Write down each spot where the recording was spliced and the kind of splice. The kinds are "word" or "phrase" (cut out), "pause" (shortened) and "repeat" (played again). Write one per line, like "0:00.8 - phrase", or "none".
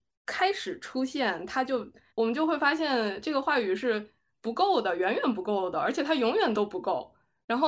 0:02.1 - pause